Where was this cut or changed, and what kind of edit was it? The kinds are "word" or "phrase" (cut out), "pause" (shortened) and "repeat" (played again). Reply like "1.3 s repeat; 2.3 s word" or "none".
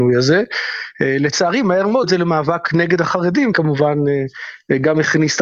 2.0 s word; 3.5 s phrase